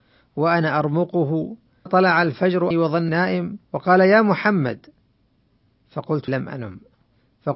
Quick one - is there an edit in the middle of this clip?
yes; 5 cuts; at 1.9 s, 2.7 s, 3.1 s, 3.6 s, 6.3 s

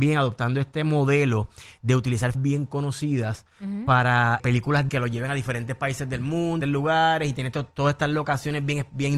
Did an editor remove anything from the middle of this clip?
yes; 4 cuts; at 2.3 s, 4.4 s, 4.9 s, 6.6 s

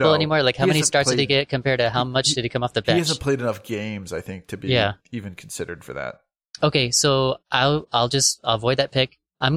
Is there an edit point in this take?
no; 0 cuts

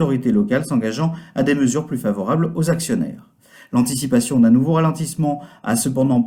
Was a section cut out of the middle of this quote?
no; 0 cuts

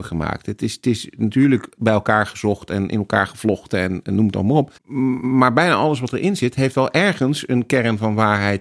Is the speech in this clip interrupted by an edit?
yes; 1 cut; at 4.7 s

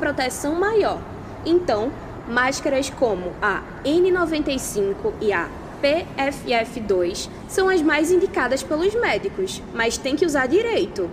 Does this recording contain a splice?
no; 0 cuts

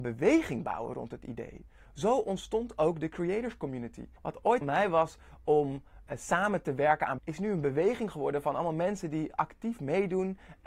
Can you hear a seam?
yes; 4 cuts; at 4.2 s, 4.6 s, 6.1 s, 7.2 s

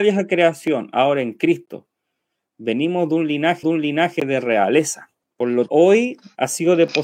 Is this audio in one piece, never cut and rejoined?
no; 3 cuts; at 3.6 s, 5.2 s, 5.7 s

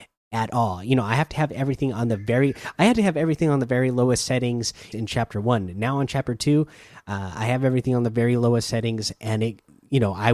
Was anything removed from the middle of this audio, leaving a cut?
yes; 1 cut; at 4.9 s

